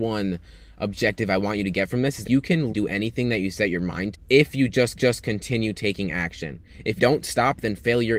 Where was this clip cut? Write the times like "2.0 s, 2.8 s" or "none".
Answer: 2.2 s, 2.7 s, 4.1 s, 5.0 s, 7.0 s